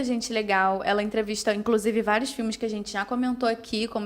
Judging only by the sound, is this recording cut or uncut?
uncut